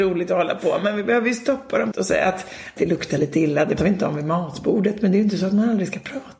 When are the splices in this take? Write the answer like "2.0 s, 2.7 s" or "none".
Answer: 1.9 s, 2.8 s, 3.8 s